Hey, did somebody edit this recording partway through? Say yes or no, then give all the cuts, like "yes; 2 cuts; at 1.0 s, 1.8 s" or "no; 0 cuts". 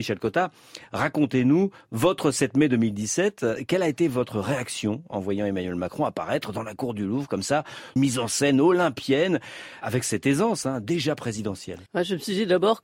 yes; 3 cuts; at 8.0 s, 9.8 s, 11.9 s